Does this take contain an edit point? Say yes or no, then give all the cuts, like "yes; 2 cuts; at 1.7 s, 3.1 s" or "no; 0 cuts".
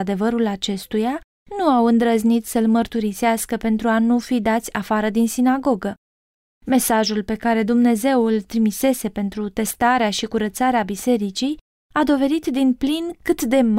no; 0 cuts